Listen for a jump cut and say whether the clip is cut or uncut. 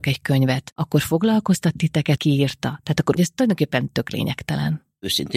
cut